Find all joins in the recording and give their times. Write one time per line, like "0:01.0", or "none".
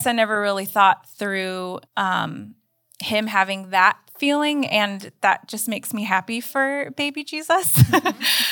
0:01.9

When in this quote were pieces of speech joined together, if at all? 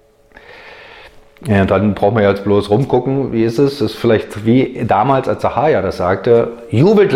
none

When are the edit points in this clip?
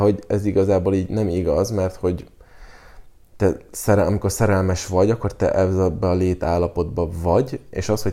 none

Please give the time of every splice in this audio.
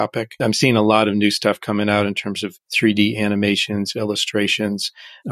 0:02.6

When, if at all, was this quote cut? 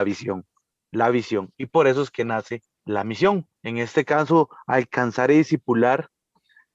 0:02.7
0:03.6

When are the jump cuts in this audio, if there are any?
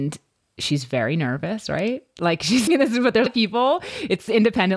0:02.7
0:03.3

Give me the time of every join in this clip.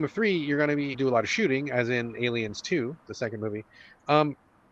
0:00.9

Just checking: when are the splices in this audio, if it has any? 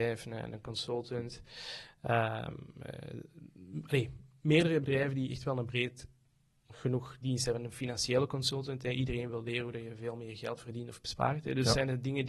none

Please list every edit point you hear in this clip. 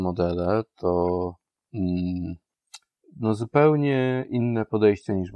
none

